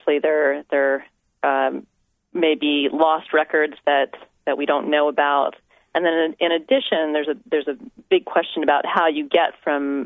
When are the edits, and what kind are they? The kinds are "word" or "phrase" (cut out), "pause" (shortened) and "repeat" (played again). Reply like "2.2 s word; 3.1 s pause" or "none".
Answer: none